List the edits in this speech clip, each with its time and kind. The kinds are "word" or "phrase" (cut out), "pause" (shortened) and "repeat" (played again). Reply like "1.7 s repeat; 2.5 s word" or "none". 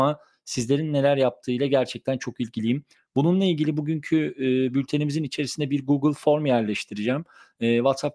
none